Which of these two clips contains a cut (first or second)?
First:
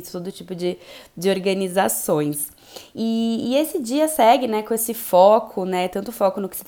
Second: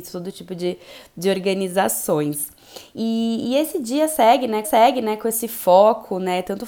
second